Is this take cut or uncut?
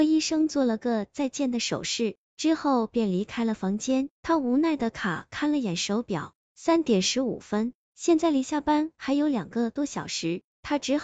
cut